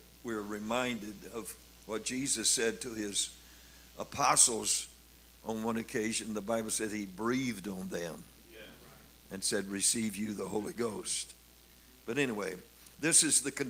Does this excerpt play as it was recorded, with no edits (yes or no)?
yes